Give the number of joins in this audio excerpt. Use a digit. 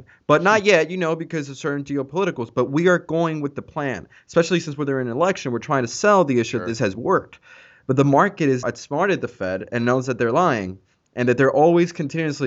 1